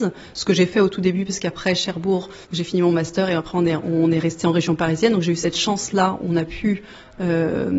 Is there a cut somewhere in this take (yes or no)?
yes